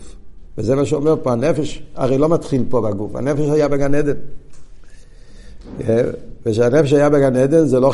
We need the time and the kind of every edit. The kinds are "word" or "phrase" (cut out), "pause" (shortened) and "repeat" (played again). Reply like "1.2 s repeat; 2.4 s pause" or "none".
none